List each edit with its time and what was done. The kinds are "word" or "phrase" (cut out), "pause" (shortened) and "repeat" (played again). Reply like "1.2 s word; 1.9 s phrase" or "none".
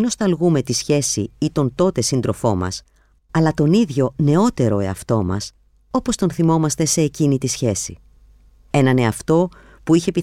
none